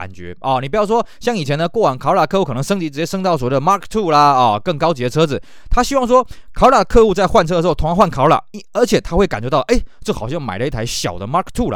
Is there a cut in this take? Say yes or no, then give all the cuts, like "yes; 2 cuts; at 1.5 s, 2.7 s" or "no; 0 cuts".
no; 0 cuts